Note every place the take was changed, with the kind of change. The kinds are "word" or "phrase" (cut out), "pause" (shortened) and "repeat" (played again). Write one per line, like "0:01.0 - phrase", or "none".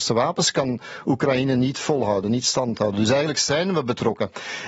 none